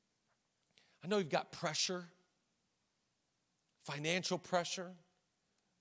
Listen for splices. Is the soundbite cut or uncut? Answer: uncut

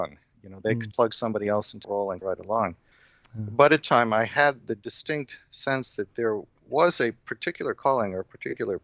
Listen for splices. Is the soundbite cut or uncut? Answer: cut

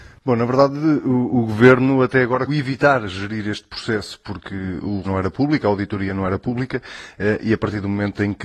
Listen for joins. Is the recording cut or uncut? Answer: cut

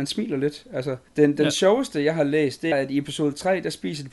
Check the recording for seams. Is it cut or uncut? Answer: cut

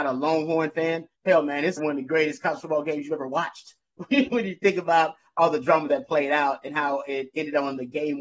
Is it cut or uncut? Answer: cut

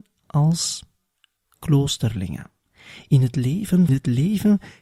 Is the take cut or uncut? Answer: cut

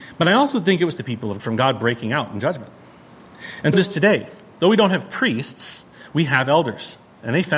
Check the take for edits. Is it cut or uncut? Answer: cut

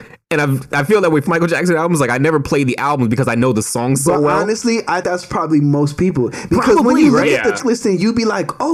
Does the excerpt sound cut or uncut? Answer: cut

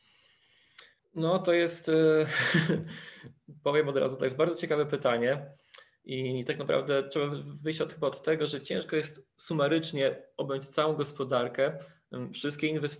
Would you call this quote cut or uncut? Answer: cut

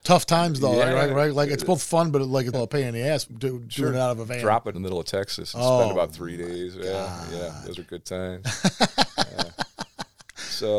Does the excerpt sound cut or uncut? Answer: cut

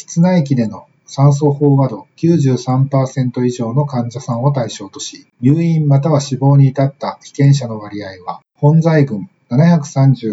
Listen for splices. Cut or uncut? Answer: cut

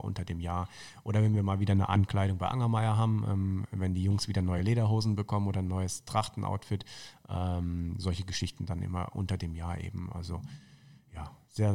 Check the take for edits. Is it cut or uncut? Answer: uncut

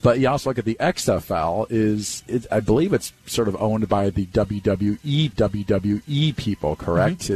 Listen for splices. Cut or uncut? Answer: cut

